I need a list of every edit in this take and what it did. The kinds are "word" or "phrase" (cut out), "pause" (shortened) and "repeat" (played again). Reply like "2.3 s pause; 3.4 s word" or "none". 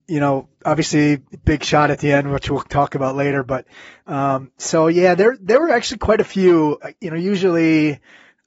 1.3 s word

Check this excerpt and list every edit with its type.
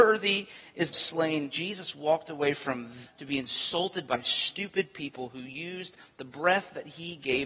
0.9 s phrase; 3.1 s word

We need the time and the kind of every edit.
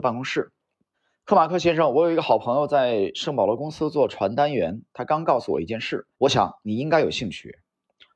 0.9 s pause; 6.1 s pause

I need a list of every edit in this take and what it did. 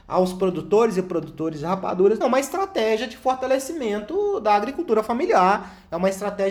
2.2 s word

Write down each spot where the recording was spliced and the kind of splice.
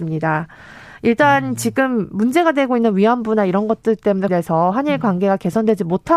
4.3 s word

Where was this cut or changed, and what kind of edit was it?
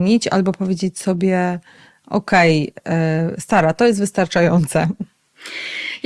none

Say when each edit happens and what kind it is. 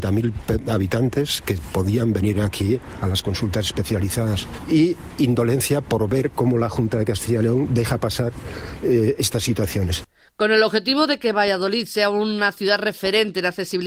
none

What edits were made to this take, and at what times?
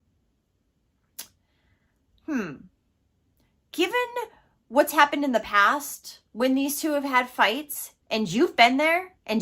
8.0 s pause

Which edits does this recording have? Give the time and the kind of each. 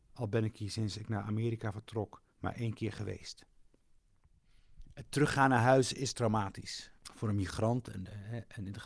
2.3 s pause; 7.0 s pause

